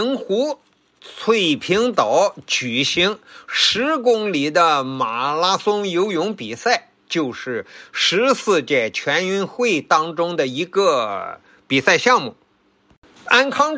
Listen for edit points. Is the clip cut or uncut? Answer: uncut